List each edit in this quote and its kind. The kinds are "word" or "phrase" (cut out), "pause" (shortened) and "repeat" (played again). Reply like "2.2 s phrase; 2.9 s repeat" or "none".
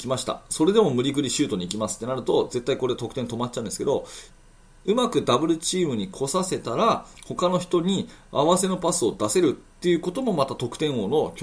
none